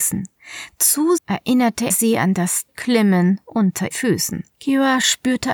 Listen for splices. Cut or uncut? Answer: cut